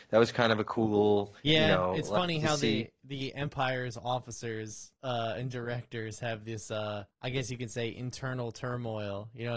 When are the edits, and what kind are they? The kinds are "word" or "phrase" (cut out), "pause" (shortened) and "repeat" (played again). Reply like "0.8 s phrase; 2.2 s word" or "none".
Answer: 1.4 s pause; 5.0 s pause; 7.1 s pause

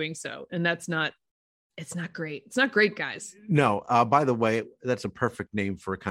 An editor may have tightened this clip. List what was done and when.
none

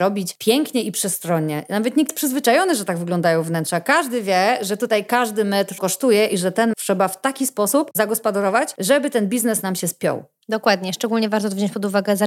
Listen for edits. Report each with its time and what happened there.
2.1 s word; 5.8 s word; 6.7 s word

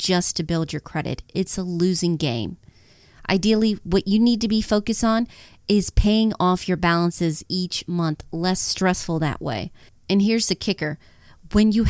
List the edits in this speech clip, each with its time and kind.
none

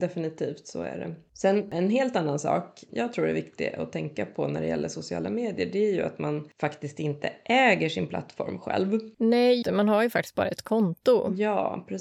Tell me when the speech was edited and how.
2.9 s word; 9.6 s word

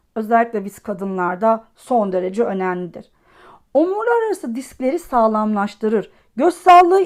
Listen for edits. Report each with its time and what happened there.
none

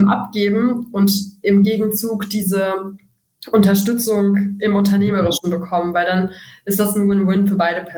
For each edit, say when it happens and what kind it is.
none

